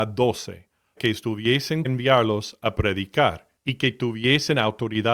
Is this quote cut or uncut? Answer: cut